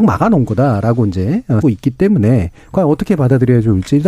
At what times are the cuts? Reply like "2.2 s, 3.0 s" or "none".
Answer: 1.6 s